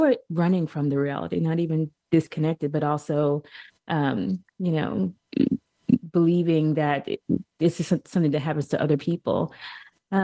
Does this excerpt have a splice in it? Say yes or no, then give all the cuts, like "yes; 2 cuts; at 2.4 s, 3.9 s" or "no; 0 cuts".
no; 0 cuts